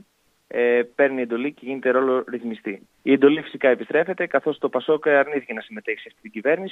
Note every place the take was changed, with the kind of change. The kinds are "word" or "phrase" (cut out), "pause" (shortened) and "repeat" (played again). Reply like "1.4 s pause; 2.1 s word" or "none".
2.9 s pause